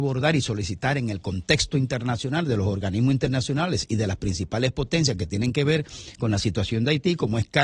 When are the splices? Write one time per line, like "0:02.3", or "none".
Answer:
none